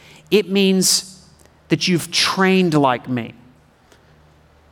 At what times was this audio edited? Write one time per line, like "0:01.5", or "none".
none